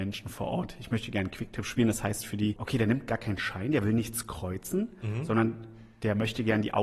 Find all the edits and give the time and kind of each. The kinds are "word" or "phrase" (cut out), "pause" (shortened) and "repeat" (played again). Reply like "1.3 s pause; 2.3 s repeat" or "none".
none